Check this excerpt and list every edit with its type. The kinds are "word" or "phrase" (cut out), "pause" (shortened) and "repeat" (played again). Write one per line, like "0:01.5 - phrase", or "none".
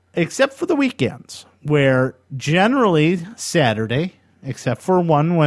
none